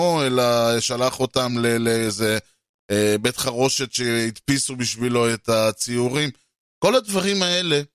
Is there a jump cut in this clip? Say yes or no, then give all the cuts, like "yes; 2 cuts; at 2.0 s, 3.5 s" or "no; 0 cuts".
no; 0 cuts